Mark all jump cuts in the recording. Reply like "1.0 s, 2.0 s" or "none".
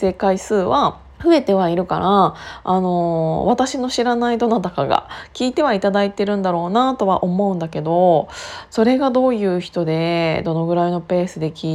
1.1 s